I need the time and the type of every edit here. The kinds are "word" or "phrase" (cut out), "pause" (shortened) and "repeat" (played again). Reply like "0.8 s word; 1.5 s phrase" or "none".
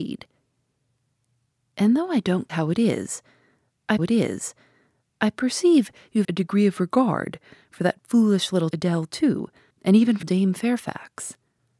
2.5 s word; 4.0 s repeat; 6.2 s word; 8.7 s word; 9.7 s pause; 10.2 s word

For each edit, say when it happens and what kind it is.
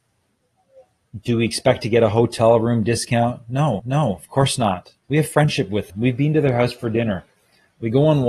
3.8 s repeat; 5.0 s pause; 5.9 s word

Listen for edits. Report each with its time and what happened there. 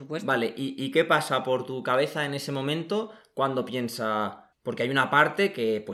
4.5 s pause

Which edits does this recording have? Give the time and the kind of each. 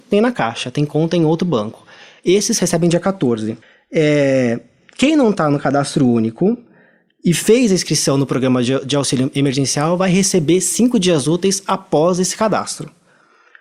3.6 s pause

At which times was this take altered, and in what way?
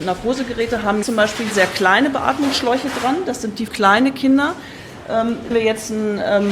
1.0 s word; 1.5 s word; 3.7 s word; 5.5 s word

